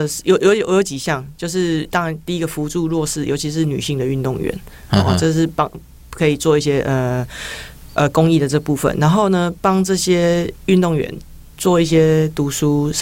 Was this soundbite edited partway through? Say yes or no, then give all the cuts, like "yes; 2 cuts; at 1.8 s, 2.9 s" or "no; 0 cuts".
no; 0 cuts